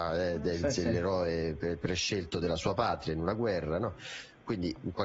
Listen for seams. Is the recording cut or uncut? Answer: uncut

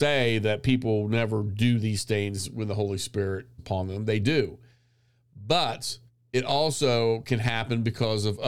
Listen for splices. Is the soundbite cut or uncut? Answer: cut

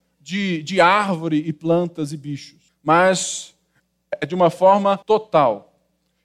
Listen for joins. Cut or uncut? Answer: cut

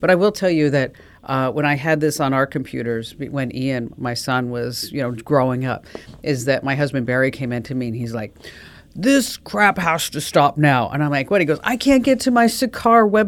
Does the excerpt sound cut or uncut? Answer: uncut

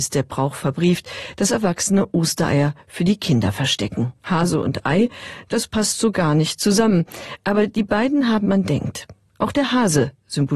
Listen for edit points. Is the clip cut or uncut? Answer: cut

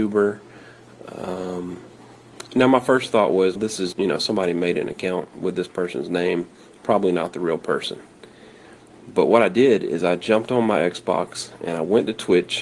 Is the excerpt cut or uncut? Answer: cut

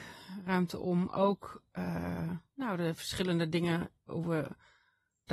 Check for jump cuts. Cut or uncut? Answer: uncut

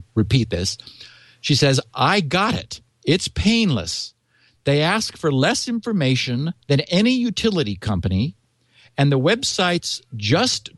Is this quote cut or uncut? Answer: cut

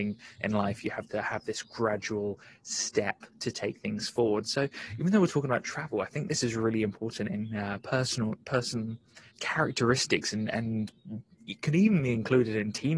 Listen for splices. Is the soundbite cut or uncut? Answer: cut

